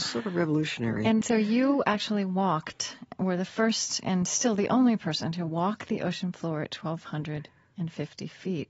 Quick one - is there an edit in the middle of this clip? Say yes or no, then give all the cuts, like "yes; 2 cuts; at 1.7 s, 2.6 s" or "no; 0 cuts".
no; 0 cuts